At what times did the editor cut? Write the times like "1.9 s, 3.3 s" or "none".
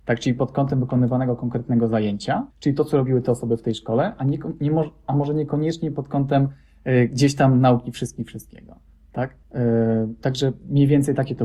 2.5 s, 9.4 s